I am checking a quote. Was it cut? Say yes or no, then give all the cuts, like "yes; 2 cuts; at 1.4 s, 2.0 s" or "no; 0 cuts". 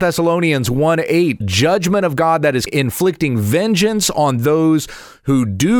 yes; 2 cuts; at 1.4 s, 2.7 s